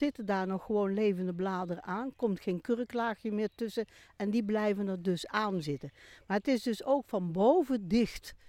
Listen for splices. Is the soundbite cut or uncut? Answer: uncut